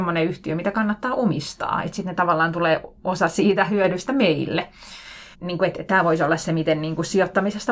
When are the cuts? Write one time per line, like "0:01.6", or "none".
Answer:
0:05.3